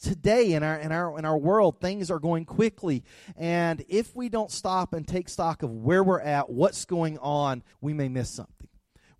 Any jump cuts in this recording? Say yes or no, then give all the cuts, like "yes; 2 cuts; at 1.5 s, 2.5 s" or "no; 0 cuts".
yes; 1 cut; at 7.7 s